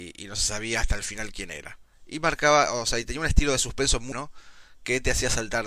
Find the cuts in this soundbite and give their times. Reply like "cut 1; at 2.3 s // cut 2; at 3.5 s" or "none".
cut 1; at 4.1 s